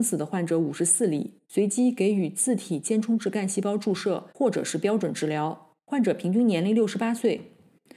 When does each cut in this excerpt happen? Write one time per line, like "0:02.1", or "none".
0:01.4
0:04.3
0:05.8